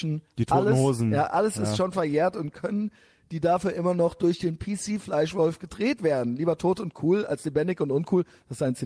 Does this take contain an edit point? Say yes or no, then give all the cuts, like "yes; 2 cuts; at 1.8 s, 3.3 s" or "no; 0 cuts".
no; 0 cuts